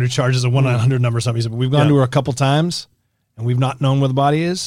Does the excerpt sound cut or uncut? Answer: uncut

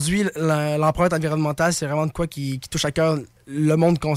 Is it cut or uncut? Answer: uncut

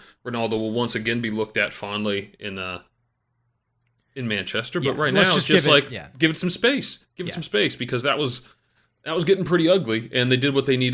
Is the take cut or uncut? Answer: uncut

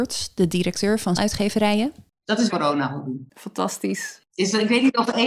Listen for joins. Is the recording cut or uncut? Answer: cut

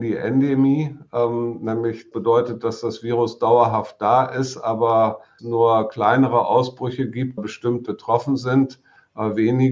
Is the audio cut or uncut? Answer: cut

